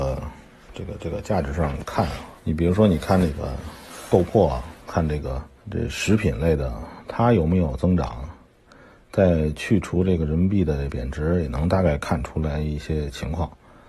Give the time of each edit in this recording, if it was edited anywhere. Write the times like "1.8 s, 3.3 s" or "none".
2.4 s, 5.6 s